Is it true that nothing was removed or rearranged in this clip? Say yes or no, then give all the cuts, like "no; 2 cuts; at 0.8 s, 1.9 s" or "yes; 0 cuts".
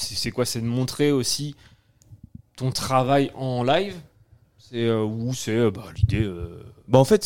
yes; 0 cuts